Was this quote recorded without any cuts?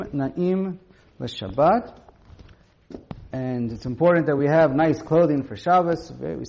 yes; 0 cuts

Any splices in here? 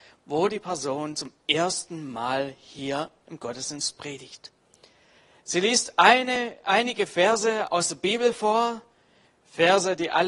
no; 0 cuts

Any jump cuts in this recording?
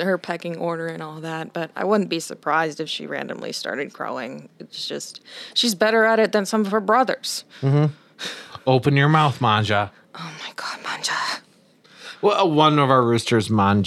no; 0 cuts

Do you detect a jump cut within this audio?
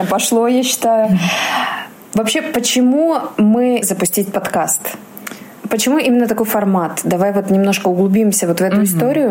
yes; 1 cut; at 3.8 s

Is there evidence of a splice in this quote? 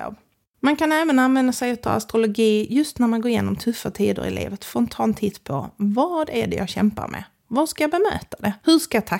no; 0 cuts

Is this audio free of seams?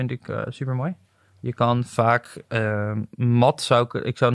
yes; 0 cuts

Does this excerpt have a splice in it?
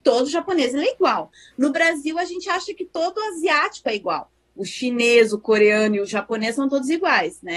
no; 0 cuts

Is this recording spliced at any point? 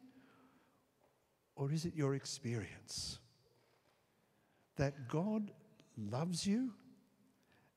no; 0 cuts

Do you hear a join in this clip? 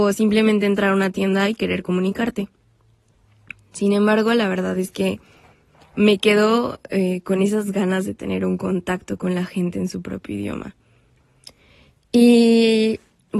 no; 0 cuts

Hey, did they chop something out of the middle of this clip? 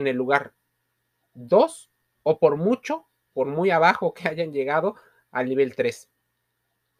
no; 0 cuts

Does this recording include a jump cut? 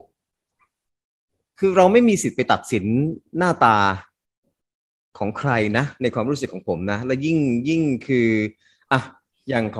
no; 0 cuts

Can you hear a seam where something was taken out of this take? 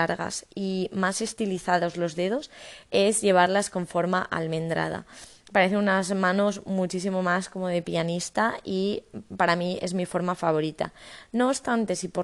no; 0 cuts

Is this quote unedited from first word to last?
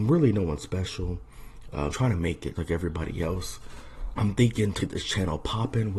no; 4 cuts; at 1.9 s, 2.6 s, 4.2 s, 4.8 s

